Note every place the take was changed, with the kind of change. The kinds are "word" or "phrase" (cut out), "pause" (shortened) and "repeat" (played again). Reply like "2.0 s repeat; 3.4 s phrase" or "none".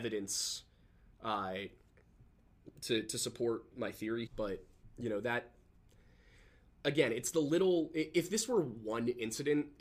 3.7 s word; 4.3 s word